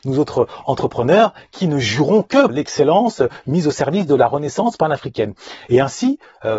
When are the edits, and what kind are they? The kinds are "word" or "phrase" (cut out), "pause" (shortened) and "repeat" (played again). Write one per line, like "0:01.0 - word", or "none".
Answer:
0:02.5 - word